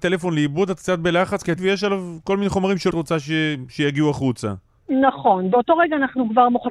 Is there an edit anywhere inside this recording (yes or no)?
yes